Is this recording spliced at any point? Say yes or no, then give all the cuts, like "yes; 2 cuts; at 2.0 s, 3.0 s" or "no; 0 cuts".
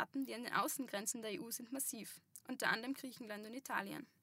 no; 0 cuts